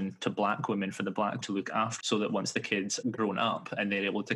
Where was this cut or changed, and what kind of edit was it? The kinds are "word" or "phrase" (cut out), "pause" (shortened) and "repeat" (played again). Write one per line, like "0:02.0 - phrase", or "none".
0:01.4 - word
0:02.0 - word
0:03.0 - word